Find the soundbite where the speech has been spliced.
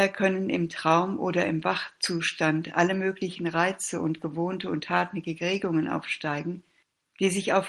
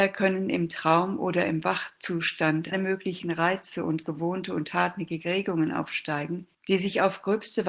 second; 2 cuts; at 2.7 s, 6.5 s

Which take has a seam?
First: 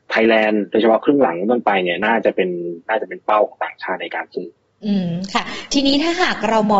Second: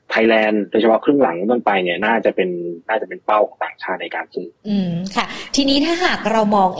second; 1 cut; at 4.6 s

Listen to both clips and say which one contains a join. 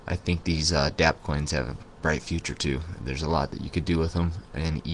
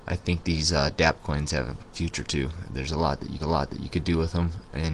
second; 2 cuts; at 1.9 s, 3.4 s

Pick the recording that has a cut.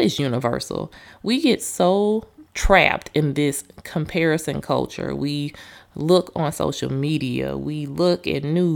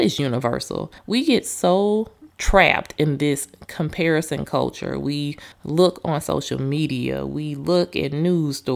second; 2 cuts; at 1.0 s, 5.5 s

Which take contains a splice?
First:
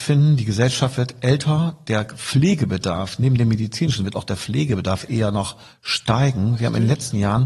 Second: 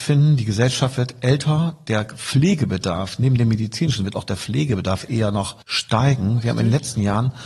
second; 1 cut; at 5.6 s

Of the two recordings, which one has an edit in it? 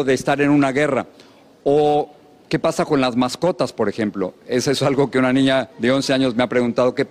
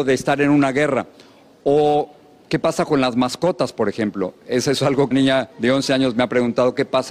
second; 1 cut; at 5.1 s

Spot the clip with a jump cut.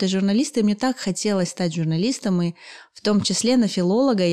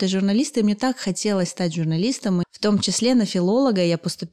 second; 1 cut; at 2.4 s

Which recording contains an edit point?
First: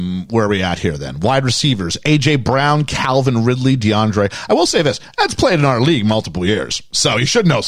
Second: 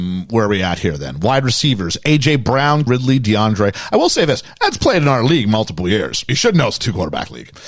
second; 2 cuts; at 2.9 s, 6.3 s

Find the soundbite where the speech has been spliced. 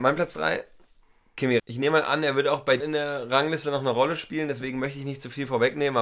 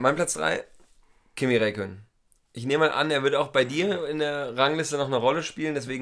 first; 2 cuts; at 1.6 s, 2.8 s

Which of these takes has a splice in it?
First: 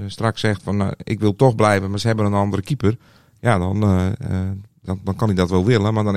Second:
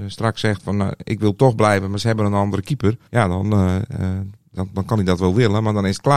second; 1 cut; at 3.1 s

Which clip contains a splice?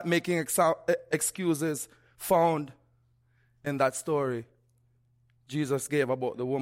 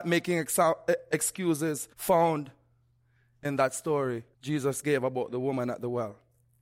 second; 2 cuts; at 1.9 s, 4.3 s

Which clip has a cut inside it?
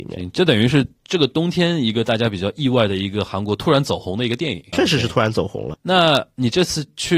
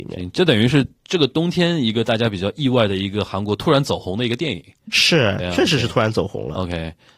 first; 2 cuts; at 4.7 s, 5.7 s

